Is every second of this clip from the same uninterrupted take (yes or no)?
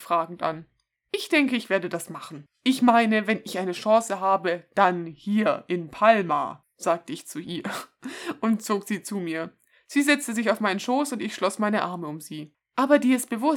yes